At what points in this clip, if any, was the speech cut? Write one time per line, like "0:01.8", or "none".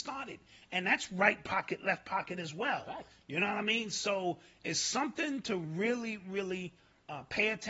none